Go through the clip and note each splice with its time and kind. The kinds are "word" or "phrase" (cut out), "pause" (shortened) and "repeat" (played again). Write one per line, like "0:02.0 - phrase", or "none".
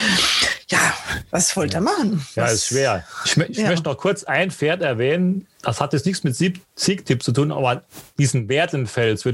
none